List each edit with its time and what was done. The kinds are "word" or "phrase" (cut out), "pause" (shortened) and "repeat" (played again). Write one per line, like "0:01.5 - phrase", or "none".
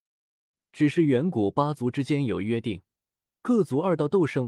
none